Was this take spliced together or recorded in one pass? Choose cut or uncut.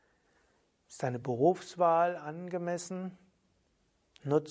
uncut